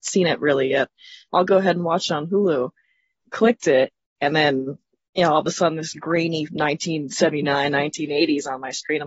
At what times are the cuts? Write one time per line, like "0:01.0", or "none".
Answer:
0:06.5